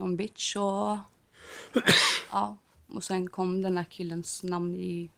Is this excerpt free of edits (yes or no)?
yes